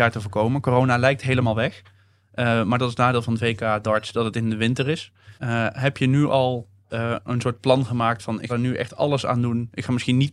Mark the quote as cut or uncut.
cut